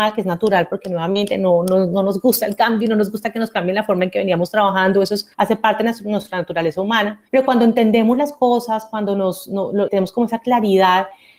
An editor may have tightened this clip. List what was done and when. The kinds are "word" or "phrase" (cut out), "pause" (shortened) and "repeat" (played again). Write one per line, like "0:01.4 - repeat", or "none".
0:05.3 - pause
0:07.3 - pause
0:09.9 - word